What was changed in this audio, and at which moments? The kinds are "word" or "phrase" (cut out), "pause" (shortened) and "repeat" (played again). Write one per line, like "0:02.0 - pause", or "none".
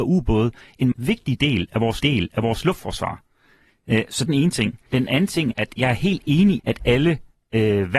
0:00.9 - word
0:02.0 - repeat
0:04.3 - phrase
0:04.9 - pause
0:05.5 - word
0:06.6 - word